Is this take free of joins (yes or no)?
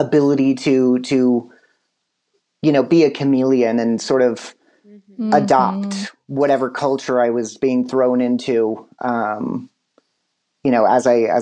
yes